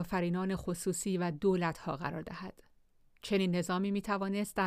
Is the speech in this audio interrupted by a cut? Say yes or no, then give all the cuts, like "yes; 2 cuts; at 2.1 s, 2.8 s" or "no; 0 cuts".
no; 0 cuts